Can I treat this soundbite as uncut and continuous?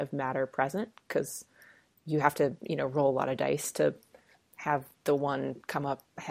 no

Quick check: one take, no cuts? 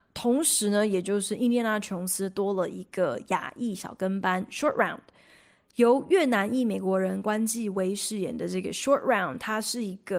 yes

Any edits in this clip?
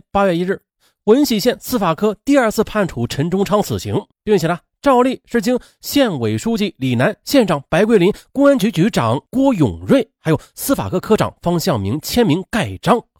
yes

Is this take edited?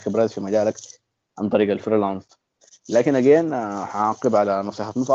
no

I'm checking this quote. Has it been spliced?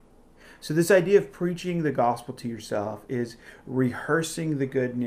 no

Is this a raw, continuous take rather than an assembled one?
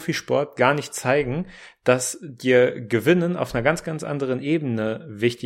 yes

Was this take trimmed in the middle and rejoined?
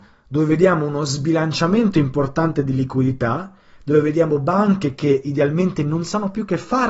no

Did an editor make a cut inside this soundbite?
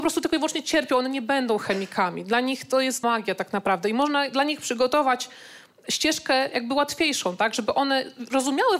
yes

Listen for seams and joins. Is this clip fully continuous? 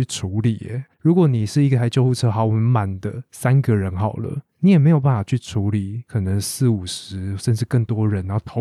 no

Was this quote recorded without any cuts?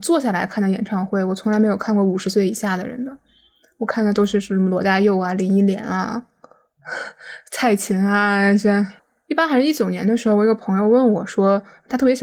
yes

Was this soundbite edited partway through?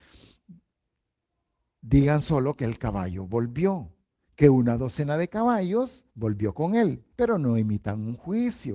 yes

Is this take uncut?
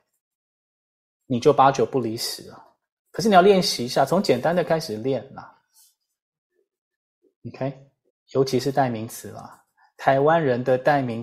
no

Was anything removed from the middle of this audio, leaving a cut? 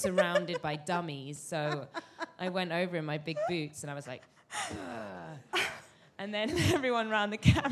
no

